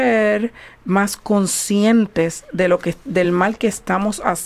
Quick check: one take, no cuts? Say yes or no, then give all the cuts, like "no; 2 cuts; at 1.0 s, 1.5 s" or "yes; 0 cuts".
yes; 0 cuts